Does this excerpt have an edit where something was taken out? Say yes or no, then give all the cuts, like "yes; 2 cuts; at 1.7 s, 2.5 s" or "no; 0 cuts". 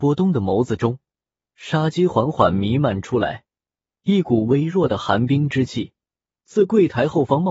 no; 0 cuts